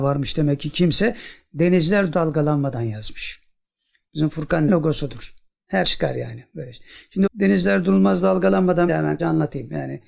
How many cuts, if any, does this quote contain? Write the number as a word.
six